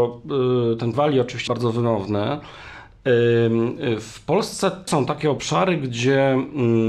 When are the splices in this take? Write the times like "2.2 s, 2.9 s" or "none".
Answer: 0.9 s, 1.5 s, 4.9 s